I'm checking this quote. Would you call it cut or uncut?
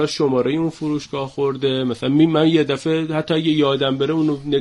uncut